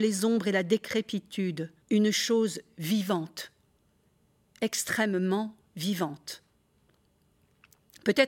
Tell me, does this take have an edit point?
yes; 2 cuts; at 1.8 s, 5.7 s

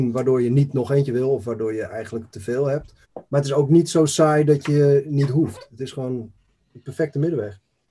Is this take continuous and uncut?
no; 1 cut; at 3.0 s

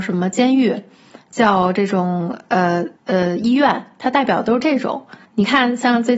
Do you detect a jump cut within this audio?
yes; 2 cuts; at 3.0 s, 5.2 s

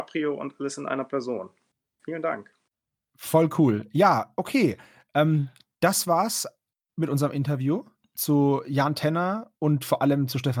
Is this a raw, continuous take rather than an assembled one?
yes; 0 cuts

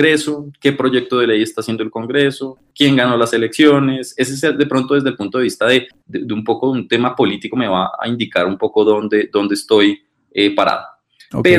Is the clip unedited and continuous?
yes; 0 cuts

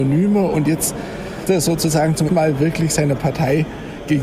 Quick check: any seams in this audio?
yes; 2 cuts; at 1.5 s, 2.3 s

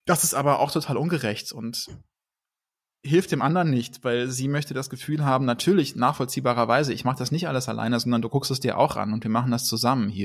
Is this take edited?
no; 0 cuts

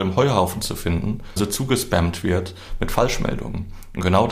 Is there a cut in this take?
yes; 1 cut; at 1.4 s

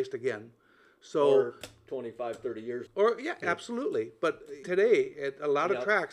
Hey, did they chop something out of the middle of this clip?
yes; 2 cuts; at 2.9 s, 4.6 s

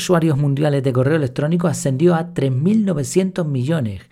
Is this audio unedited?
yes; 0 cuts

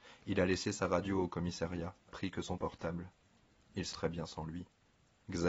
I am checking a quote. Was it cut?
yes; 3 cuts; at 2.1 s, 2.6 s, 3.9 s

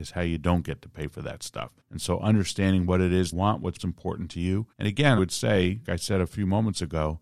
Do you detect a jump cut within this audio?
yes; 6 cuts; at 1.8 s, 3.3 s, 3.8 s, 4.7 s, 5.2 s, 5.8 s

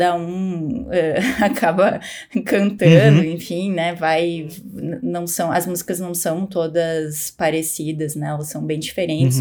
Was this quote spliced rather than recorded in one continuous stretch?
no; 0 cuts

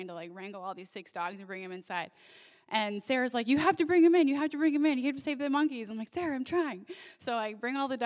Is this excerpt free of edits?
yes; 0 cuts

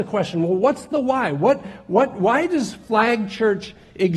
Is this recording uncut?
yes; 0 cuts

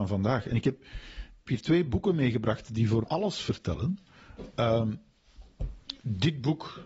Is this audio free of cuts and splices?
no; 2 cuts; at 1.5 s, 3.0 s

